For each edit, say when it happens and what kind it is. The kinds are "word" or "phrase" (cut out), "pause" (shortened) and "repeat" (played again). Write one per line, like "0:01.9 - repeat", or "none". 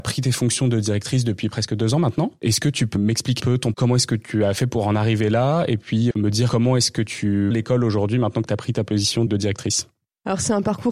0:03.0 - word
0:03.4 - word
0:03.7 - word
0:06.1 - word
0:07.5 - word
0:09.3 - word